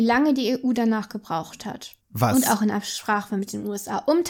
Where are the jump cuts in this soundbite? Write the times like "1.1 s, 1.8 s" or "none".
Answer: 2.0 s